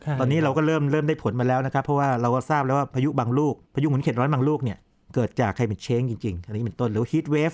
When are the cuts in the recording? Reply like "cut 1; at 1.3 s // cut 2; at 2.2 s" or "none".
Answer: none